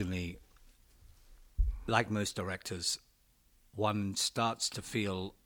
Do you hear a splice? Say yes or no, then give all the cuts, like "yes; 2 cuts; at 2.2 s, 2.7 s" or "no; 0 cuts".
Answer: no; 0 cuts